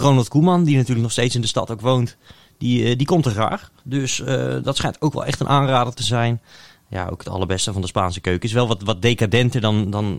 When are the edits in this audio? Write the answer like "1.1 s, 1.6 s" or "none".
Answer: 3.8 s